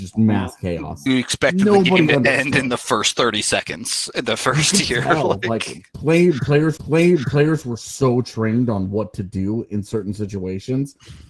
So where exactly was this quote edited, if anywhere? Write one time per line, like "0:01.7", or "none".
0:01.1
0:06.8